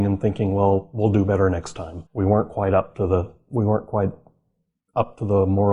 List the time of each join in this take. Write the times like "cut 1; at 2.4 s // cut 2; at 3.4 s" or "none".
cut 1; at 2.1 s